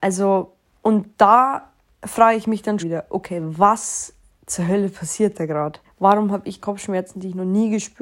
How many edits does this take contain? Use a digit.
4